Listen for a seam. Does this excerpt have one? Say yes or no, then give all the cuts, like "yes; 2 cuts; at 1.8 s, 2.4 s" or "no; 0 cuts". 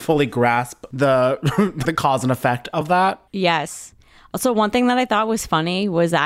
yes; 3 cuts; at 1.8 s, 2.8 s, 3.3 s